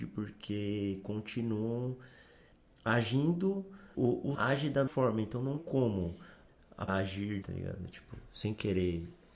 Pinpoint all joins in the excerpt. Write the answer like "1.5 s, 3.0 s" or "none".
3.9 s, 4.3 s, 4.9 s, 5.6 s, 6.9 s, 7.4 s

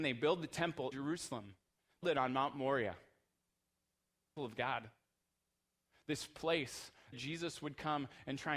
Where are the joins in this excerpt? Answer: 0.9 s, 2.0 s, 4.4 s, 7.1 s

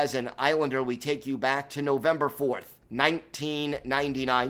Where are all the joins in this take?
2.8 s

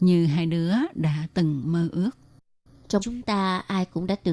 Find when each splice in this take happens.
3.0 s

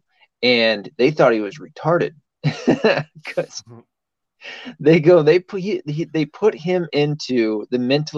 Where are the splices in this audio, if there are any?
none

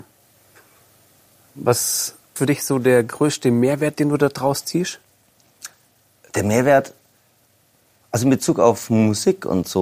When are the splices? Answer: 2.4 s

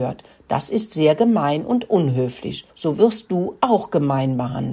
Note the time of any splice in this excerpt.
2.7 s

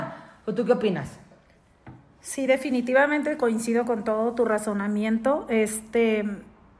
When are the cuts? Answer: none

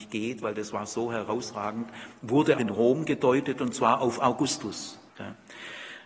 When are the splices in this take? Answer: 2.6 s, 5.1 s

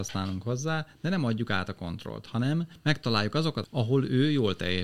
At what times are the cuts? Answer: 3.6 s

